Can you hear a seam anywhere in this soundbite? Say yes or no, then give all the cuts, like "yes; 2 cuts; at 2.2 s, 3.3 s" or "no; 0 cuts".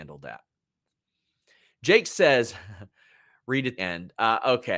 yes; 1 cut; at 3.8 s